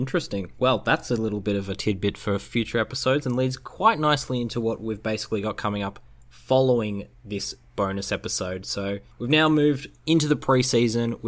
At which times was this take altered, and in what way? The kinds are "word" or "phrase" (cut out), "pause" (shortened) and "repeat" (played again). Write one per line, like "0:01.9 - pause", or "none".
0:09.1 - pause